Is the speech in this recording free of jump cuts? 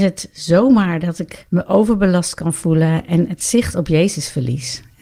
no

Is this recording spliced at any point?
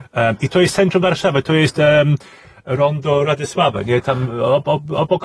no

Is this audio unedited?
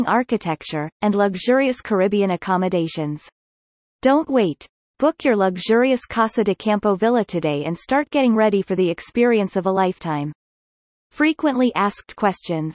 yes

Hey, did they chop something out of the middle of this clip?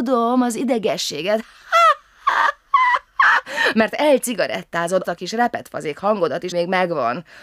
yes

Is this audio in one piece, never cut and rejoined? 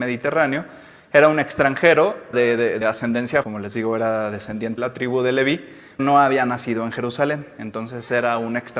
no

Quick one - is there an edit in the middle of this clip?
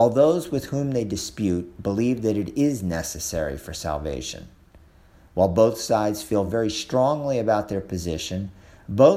no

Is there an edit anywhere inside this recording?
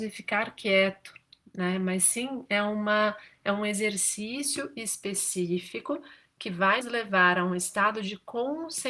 yes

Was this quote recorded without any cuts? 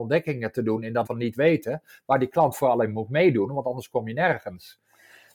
no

